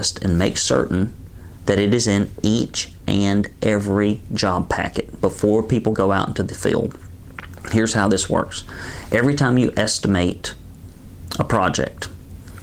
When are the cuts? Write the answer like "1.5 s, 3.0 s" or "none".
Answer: none